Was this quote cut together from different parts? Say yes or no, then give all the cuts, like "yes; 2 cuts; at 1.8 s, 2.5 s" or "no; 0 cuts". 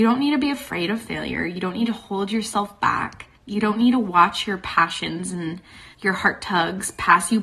yes; 2 cuts; at 3.4 s, 5.9 s